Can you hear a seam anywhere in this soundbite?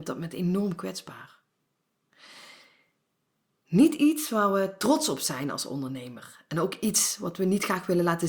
no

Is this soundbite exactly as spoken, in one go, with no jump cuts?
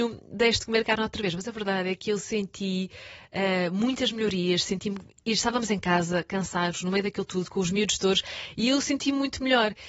yes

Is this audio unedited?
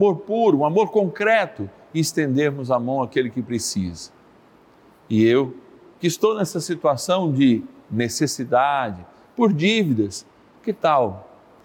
yes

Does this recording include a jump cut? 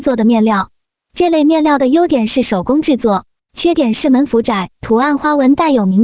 yes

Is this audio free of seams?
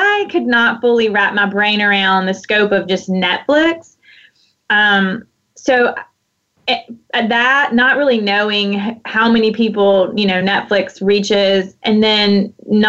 yes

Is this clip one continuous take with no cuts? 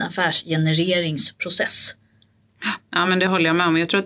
yes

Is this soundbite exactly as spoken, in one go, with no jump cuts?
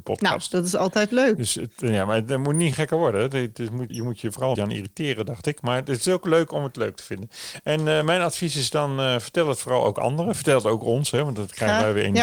no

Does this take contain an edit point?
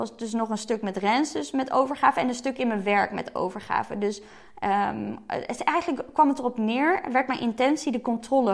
no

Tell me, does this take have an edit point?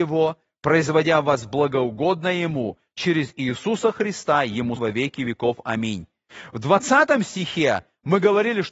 yes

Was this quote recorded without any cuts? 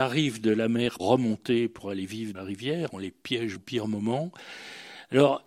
no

